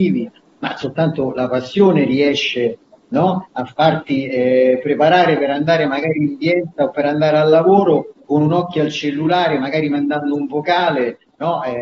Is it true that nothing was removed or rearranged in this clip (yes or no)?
yes